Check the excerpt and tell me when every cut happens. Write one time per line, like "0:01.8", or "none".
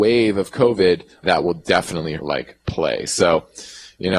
0:01.2
0:02.2

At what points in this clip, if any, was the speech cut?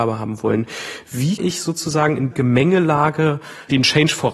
0:01.4
0:02.3

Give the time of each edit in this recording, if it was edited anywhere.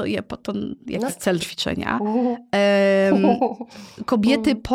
0:01.1
0:01.4

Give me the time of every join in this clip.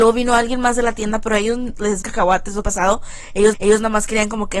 0:02.0
0:02.6
0:03.5

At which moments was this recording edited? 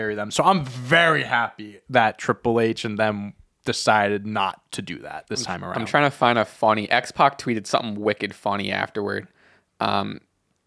none

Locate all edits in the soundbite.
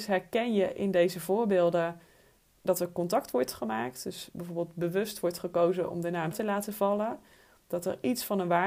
0:06.3

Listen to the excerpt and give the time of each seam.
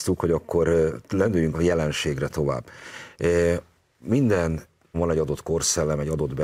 0:01.5
0:04.9

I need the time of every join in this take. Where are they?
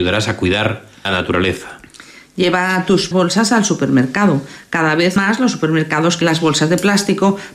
0:01.1
0:03.1
0:05.2
0:06.2

